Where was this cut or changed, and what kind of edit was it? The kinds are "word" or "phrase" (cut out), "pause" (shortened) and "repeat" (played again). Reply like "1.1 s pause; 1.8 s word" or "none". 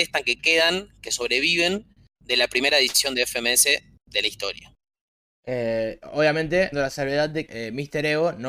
6.7 s word; 7.5 s word